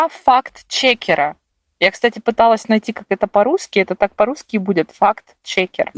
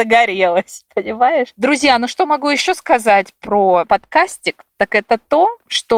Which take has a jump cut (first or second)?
second